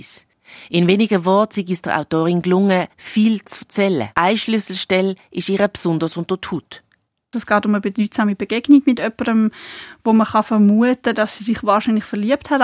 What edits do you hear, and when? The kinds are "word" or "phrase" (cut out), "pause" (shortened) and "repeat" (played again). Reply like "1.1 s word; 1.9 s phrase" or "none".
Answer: 4.1 s pause